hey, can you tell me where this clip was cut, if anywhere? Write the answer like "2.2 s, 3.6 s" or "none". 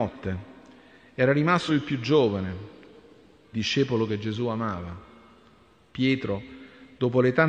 1.7 s, 3.5 s